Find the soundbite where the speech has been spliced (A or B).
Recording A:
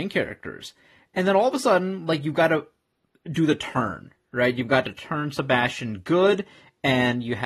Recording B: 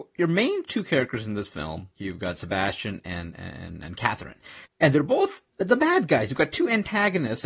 B